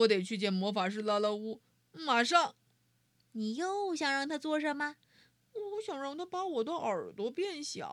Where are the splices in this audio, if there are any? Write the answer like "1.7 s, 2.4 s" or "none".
2.7 s, 5.0 s